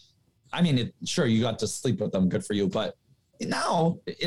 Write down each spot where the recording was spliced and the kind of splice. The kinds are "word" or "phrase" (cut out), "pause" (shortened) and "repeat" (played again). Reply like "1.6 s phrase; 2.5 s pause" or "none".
none